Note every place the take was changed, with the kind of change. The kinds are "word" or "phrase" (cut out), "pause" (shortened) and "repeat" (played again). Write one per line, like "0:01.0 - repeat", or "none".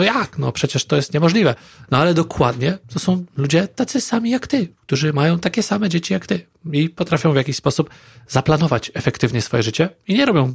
0:02.8 - pause